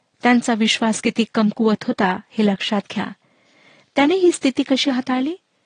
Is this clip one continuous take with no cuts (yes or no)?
yes